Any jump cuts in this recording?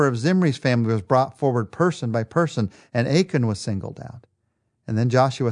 no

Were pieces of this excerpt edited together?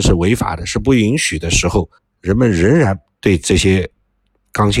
yes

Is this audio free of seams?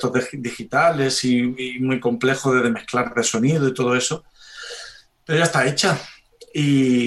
yes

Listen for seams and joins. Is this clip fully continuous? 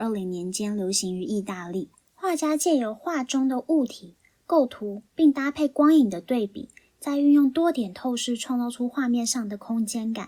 no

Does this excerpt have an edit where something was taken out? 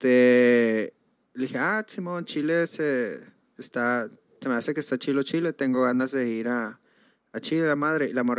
no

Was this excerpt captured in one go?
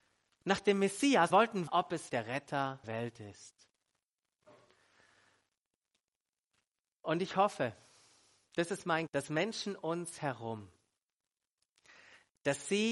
no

